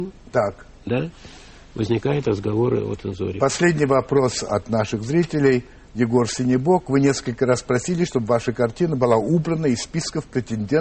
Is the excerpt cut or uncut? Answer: uncut